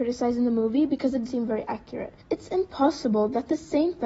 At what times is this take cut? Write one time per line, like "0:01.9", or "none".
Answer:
0:01.3
0:02.2